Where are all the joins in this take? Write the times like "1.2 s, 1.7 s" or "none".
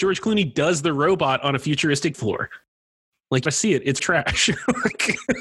2.1 s, 3.5 s, 4.0 s

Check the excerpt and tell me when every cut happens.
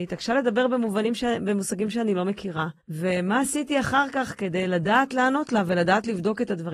2.8 s

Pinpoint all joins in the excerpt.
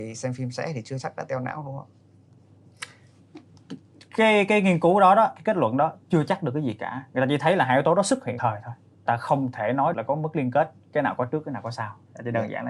8.4 s, 9.1 s, 9.9 s

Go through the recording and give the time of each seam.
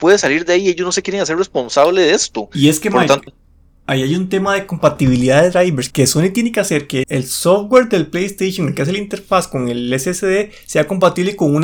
3.3 s, 5.9 s, 7.0 s

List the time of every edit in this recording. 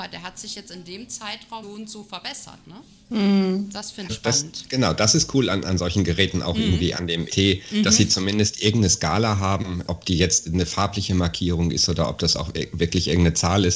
1.6 s, 4.1 s, 7.3 s, 9.9 s

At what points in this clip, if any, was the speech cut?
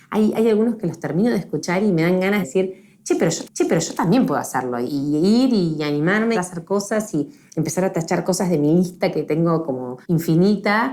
2.4 s, 3.4 s, 4.9 s, 6.3 s, 10.0 s

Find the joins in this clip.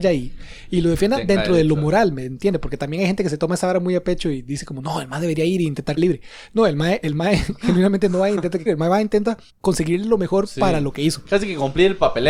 6.0 s, 8.7 s, 9.5 s

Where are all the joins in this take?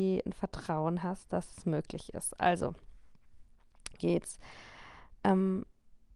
4.0 s

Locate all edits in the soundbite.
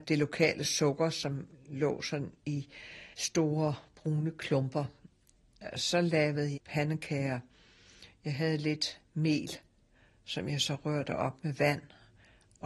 3.1 s, 6.5 s

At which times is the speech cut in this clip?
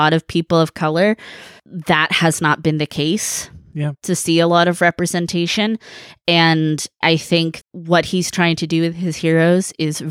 7.0 s, 7.6 s

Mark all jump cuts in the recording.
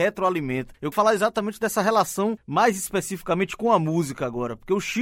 0.9 s

